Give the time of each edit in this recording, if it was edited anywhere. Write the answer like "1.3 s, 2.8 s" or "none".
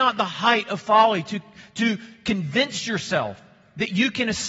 none